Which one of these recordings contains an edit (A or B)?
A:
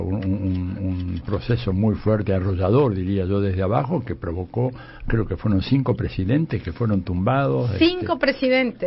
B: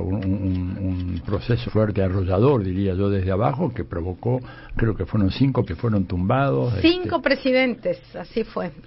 B